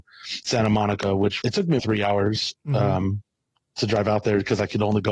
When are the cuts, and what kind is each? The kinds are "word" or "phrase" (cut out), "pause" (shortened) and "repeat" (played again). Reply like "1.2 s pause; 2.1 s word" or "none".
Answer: 1.4 s word; 1.8 s word

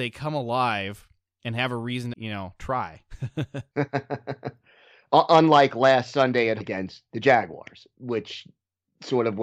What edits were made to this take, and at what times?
2.1 s word; 6.6 s word

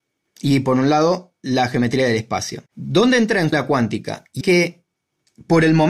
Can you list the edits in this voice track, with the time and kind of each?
2.7 s pause; 3.5 s word; 4.4 s word

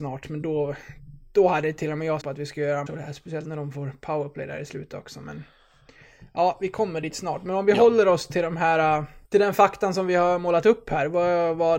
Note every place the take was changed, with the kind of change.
2.2 s phrase; 2.9 s word; 9.2 s pause

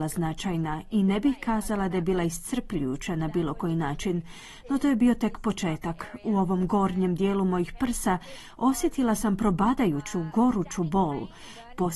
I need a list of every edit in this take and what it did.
none

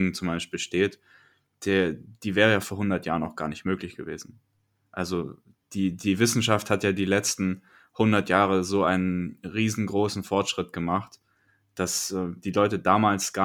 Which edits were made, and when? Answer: none

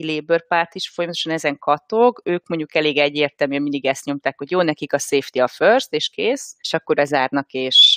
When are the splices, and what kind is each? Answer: 6.6 s pause; 6.9 s word

